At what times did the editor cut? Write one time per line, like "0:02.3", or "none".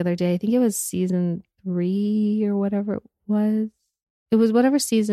none